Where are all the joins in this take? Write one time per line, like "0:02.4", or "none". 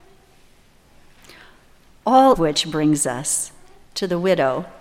0:02.3
0:03.8